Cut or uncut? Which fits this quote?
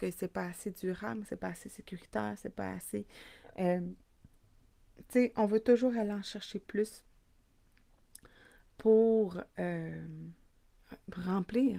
uncut